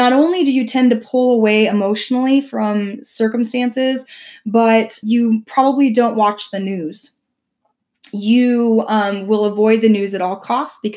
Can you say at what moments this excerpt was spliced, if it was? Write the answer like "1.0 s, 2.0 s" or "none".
5.0 s